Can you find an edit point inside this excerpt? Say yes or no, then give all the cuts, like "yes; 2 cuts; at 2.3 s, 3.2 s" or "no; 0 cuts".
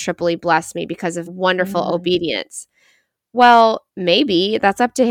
yes; 2 cuts; at 1.3 s, 3.9 s